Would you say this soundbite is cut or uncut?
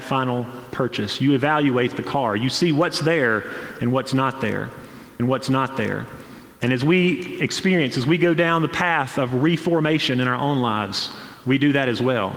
cut